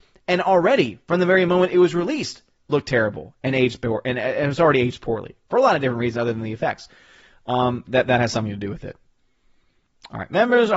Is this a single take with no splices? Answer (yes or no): no